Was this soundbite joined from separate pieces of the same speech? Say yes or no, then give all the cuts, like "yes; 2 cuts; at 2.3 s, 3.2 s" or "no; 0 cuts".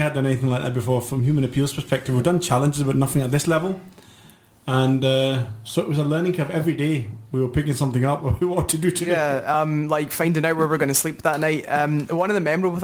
no; 0 cuts